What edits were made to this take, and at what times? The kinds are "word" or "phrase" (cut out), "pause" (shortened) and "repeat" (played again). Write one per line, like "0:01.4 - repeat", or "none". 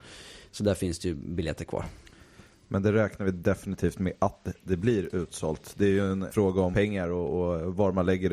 none